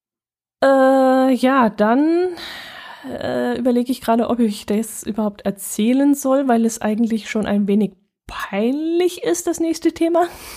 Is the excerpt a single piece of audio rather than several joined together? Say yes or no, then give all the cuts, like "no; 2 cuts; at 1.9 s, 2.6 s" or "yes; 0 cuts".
yes; 0 cuts